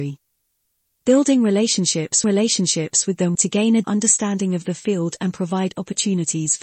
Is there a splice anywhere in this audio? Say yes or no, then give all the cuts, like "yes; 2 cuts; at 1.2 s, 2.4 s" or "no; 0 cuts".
yes; 3 cuts; at 2.2 s, 3.3 s, 3.8 s